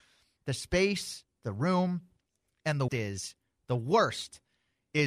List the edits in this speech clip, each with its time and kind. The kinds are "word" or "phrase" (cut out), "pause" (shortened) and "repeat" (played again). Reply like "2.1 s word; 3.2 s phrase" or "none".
2.9 s word